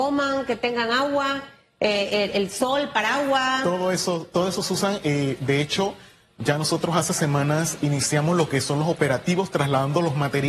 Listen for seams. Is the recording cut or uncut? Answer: uncut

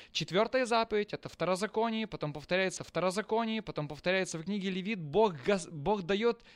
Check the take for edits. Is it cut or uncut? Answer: cut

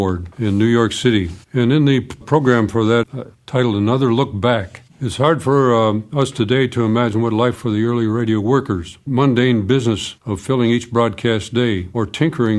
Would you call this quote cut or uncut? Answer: cut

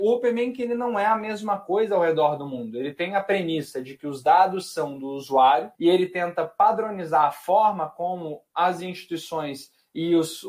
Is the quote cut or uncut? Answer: cut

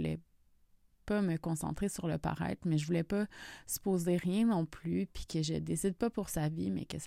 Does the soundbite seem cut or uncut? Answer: uncut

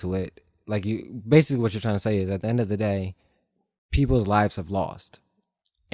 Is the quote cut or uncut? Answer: uncut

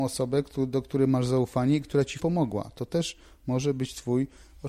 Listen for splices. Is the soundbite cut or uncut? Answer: cut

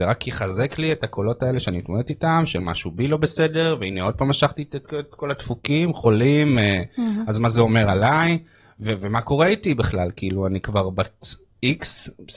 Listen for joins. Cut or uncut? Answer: uncut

